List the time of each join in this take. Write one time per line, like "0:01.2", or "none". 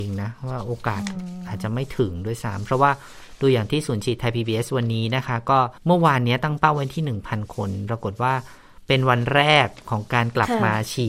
0:05.8